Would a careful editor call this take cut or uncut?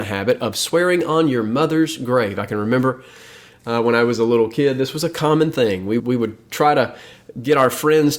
cut